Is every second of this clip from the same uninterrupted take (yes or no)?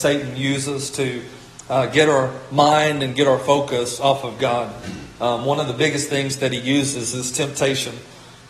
yes